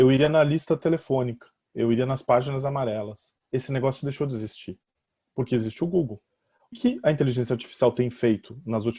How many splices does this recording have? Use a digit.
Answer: 1